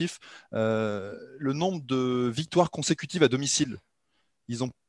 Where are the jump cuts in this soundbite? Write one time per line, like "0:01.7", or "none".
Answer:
none